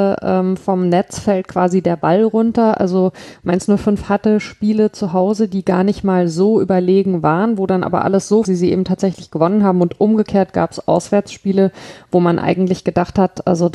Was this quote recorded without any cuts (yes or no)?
no